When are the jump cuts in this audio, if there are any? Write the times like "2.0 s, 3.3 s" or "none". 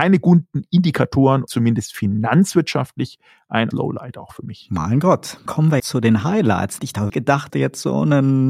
1.5 s, 3.7 s, 5.5 s, 5.8 s, 6.8 s, 7.1 s, 7.5 s